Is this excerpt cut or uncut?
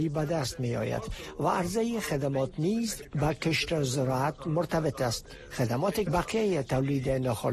cut